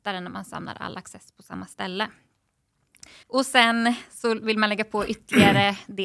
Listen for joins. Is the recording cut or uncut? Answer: cut